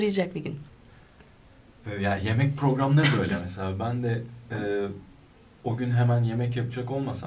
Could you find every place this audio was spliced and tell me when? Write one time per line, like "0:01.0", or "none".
none